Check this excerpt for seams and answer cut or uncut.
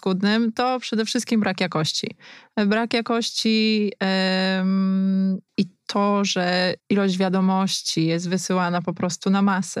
cut